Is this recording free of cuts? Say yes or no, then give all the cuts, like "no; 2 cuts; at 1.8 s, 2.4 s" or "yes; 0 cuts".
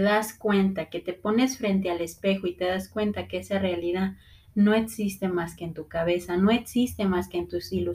yes; 0 cuts